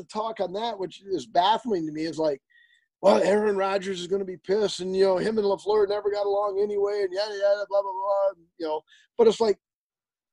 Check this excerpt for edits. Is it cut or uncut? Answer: uncut